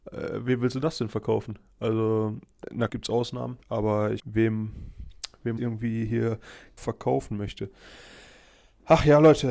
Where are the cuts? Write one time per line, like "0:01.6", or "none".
0:02.9
0:03.6
0:04.2
0:05.6
0:06.8